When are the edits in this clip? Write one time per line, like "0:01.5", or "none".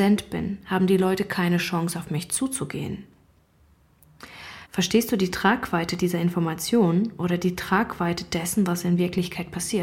0:04.6